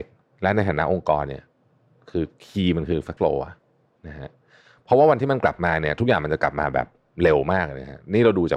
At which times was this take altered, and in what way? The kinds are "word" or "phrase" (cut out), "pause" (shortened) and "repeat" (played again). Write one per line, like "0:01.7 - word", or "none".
0:03.2 - word